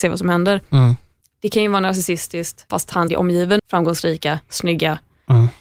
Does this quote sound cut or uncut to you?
cut